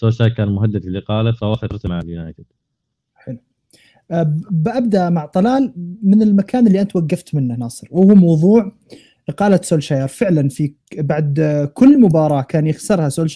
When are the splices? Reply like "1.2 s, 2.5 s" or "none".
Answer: none